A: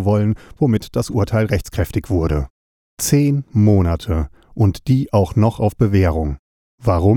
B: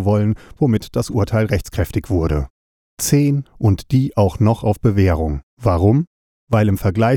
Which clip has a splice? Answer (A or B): B